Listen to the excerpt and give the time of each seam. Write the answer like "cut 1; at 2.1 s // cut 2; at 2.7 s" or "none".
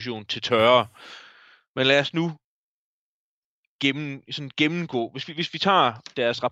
none